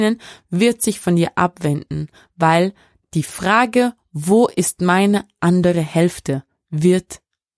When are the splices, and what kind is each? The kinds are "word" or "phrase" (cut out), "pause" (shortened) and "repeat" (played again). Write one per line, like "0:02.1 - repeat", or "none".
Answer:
none